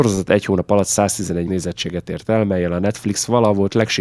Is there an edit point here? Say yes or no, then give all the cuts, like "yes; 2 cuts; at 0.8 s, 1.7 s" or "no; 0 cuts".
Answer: yes; 1 cut; at 1.5 s